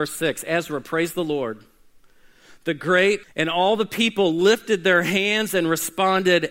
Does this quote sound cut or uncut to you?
cut